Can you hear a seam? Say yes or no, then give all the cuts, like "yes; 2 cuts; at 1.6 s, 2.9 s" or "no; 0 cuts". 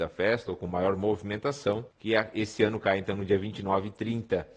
yes; 1 cut; at 1.9 s